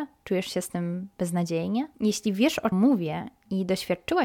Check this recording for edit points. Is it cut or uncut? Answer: cut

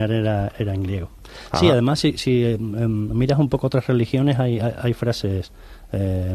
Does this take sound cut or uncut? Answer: uncut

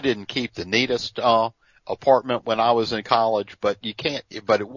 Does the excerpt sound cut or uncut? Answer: uncut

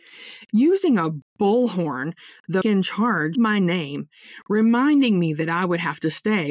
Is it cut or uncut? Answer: cut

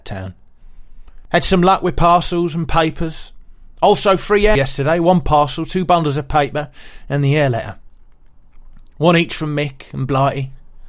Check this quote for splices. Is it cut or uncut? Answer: cut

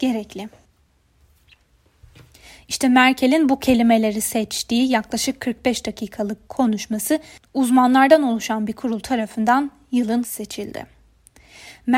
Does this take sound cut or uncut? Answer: cut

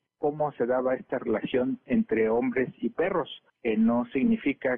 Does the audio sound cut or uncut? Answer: uncut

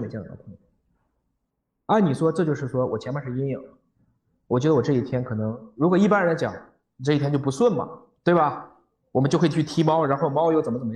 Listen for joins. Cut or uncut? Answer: uncut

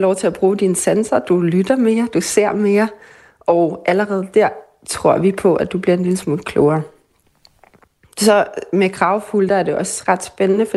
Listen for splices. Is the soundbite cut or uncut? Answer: uncut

